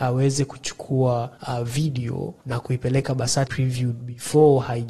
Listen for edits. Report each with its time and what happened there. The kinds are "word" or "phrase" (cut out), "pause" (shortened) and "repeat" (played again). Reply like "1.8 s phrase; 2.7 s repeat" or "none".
1.4 s pause; 2.4 s pause; 3.5 s word